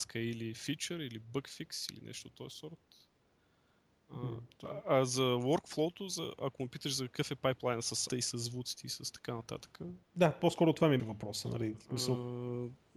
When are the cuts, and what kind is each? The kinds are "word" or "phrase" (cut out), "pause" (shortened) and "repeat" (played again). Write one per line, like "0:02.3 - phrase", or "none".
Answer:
0:08.1 - word
0:11.0 - word